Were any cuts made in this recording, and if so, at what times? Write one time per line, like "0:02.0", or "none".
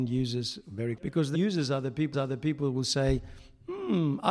0:01.0
0:01.3
0:02.1